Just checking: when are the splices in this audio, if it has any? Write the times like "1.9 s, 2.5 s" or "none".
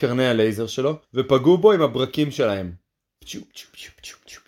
1.0 s

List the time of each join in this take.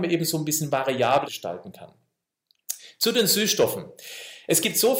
1.2 s

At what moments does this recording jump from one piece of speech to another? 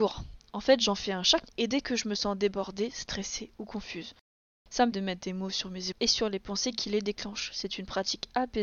1.5 s, 4.9 s, 5.9 s

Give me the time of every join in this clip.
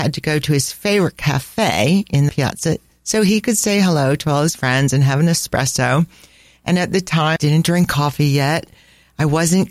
2.3 s, 7.4 s

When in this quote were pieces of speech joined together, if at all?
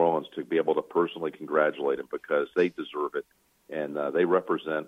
none

